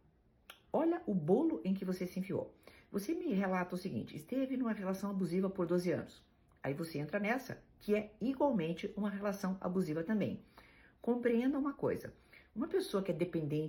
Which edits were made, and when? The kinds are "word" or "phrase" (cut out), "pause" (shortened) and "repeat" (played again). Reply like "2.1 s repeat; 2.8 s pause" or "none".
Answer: none